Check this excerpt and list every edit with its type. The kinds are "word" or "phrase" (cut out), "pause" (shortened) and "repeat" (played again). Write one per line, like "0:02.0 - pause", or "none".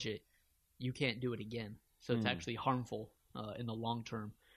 none